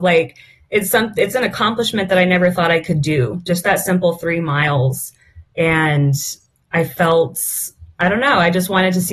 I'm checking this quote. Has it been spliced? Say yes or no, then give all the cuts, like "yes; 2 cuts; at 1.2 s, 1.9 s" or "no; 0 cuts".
no; 0 cuts